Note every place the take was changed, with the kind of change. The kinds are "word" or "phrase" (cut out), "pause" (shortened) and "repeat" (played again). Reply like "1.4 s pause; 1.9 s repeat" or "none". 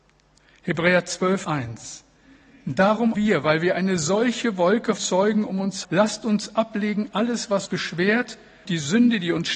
1.4 s word; 3.1 s word; 5.0 s word; 5.8 s word; 7.7 s word; 8.6 s word